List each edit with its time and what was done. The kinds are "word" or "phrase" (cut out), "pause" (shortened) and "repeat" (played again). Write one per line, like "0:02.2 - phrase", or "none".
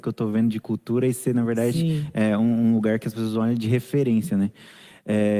none